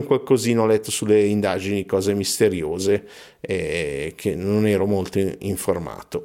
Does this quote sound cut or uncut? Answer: uncut